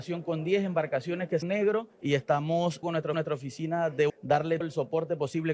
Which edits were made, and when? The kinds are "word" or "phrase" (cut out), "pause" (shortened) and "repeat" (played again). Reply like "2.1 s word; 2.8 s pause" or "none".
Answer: 1.4 s phrase; 1.9 s pause; 2.8 s phrase; 3.1 s repeat; 4.1 s word; 4.6 s word